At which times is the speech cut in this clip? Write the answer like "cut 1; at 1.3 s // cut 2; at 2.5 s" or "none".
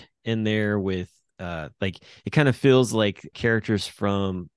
cut 1; at 3.3 s